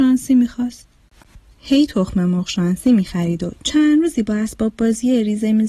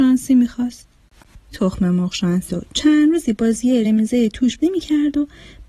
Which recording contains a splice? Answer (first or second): second